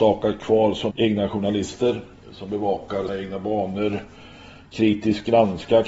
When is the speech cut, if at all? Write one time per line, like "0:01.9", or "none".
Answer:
0:00.9
0:02.2
0:03.1